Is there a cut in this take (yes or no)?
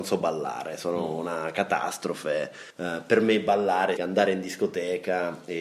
yes